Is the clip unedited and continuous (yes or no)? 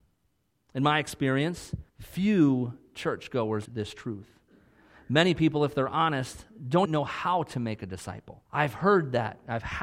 no